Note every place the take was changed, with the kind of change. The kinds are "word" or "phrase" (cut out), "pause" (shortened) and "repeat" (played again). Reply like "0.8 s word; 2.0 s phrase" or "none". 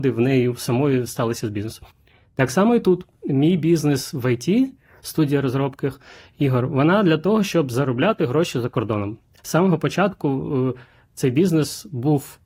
none